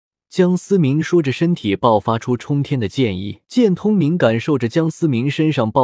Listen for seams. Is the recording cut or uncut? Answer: cut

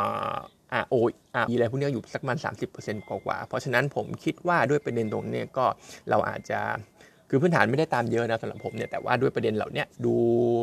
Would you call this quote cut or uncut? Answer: cut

